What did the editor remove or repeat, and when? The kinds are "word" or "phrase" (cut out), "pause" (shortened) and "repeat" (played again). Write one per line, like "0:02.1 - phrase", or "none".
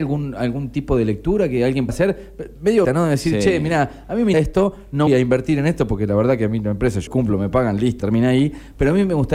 0:01.9 - word
0:02.8 - word
0:04.3 - word
0:05.1 - word
0:07.1 - word
0:08.0 - word

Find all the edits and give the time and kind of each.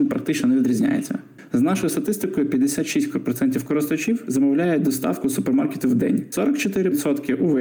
none

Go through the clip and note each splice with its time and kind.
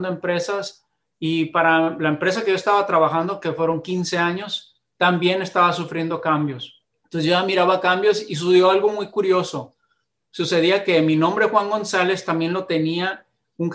0:06.8 - pause

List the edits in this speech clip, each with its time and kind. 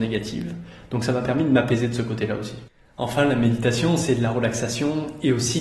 none

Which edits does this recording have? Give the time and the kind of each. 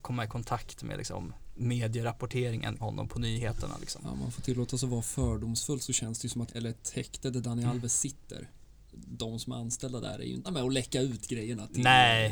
0:02.8 - word
0:06.5 - phrase
0:10.4 - word

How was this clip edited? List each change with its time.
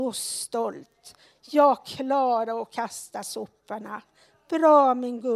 none

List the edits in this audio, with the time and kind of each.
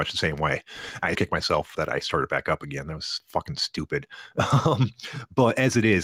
0:01.1 - word
0:01.7 - word

